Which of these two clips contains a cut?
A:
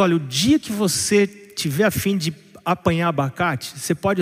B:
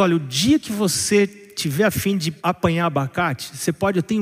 B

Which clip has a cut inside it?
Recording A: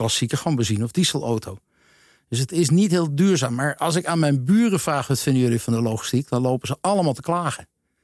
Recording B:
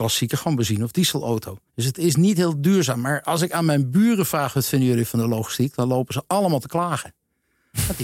B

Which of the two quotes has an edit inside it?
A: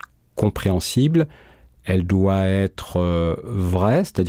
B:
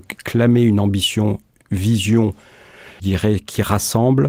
B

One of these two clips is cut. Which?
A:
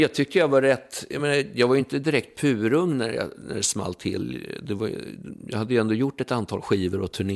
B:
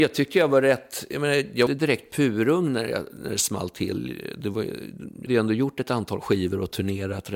B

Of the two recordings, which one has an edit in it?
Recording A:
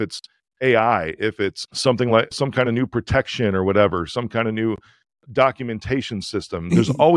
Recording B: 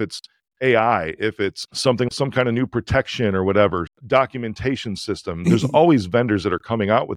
B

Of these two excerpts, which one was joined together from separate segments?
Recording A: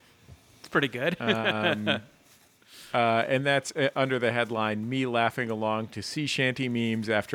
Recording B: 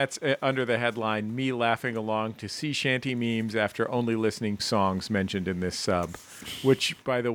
B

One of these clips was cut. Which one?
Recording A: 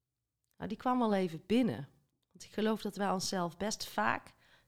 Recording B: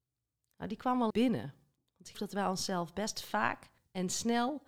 B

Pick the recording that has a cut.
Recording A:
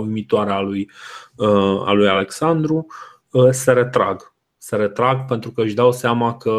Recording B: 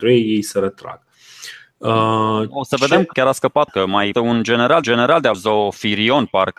B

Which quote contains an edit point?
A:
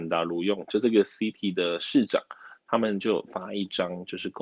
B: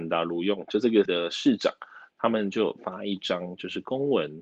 B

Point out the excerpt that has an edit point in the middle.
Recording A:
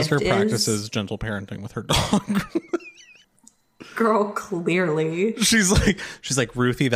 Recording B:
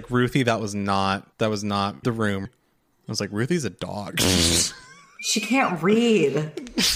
B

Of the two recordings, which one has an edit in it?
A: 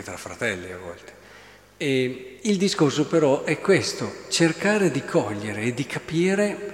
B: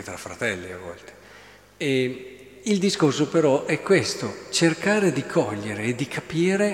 A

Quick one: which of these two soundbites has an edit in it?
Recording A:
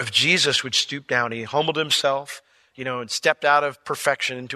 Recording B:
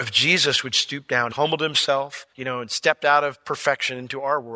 B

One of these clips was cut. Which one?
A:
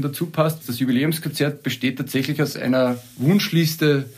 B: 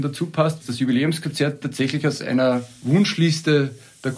B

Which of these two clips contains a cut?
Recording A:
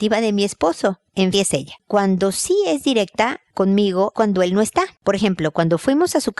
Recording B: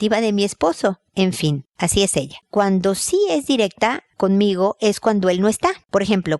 A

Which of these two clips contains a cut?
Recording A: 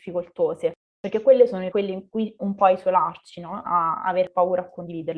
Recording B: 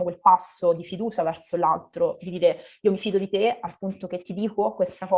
A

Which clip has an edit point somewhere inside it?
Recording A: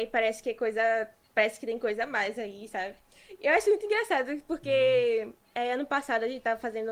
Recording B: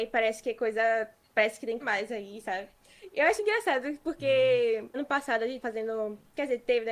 B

